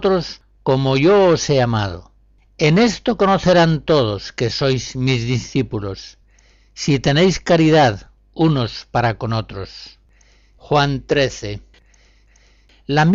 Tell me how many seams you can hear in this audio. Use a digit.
0